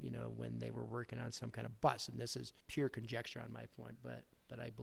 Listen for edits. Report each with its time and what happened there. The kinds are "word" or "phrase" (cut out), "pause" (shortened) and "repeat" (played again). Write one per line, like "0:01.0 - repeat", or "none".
0:02.6 - pause